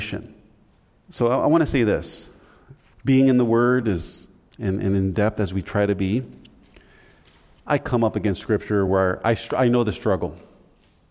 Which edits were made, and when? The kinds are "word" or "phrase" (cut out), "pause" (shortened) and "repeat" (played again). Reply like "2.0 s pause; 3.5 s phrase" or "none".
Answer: none